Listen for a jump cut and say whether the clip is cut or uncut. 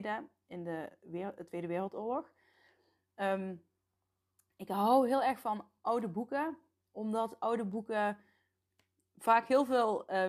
uncut